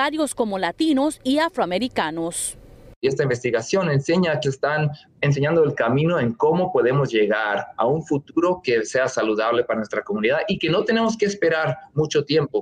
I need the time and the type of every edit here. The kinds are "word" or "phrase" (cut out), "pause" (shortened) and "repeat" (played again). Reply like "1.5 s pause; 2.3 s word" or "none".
4.4 s phrase; 5.1 s word